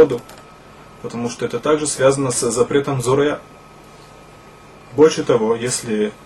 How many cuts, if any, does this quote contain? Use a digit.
0